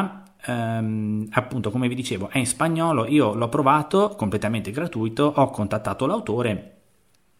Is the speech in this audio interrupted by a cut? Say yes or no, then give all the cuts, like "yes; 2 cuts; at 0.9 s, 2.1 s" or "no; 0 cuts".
no; 0 cuts